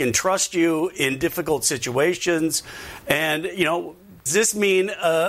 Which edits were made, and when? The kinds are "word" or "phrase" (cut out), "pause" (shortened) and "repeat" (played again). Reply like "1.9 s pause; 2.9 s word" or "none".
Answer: 4.3 s word